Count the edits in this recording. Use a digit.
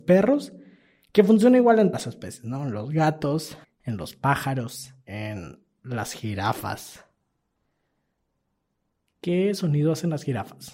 3